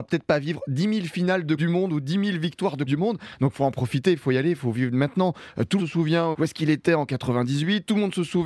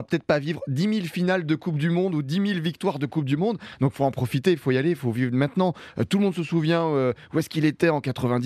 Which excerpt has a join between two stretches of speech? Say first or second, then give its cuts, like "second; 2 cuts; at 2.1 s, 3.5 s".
first; 4 cuts; at 1.6 s, 2.9 s, 5.8 s, 6.3 s